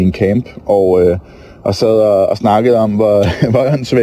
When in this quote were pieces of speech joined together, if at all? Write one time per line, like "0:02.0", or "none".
none